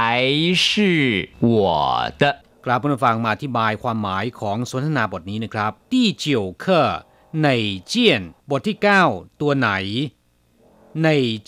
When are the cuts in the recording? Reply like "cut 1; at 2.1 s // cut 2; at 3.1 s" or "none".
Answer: cut 1; at 1.3 s // cut 2; at 2.5 s // cut 3; at 5.8 s // cut 4; at 8.4 s